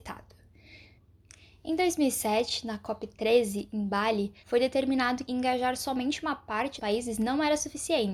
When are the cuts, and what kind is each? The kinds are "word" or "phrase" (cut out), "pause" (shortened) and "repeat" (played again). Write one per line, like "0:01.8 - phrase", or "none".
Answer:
0:04.4 - pause
0:05.3 - word
0:06.8 - word